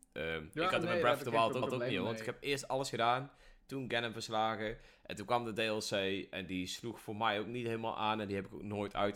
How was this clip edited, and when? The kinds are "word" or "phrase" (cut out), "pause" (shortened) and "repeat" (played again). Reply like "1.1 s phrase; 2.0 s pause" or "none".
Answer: 1.6 s repeat